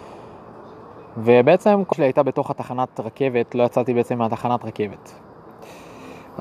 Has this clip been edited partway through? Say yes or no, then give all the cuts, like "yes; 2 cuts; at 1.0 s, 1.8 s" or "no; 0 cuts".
yes; 1 cut; at 1.9 s